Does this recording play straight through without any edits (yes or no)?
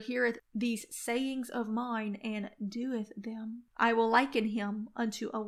no